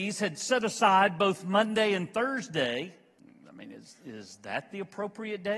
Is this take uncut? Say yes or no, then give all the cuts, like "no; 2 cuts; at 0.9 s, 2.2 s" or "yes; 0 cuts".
no; 1 cut; at 3.2 s